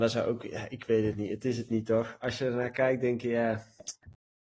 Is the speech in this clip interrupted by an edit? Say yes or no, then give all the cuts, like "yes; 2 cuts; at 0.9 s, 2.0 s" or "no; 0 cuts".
no; 0 cuts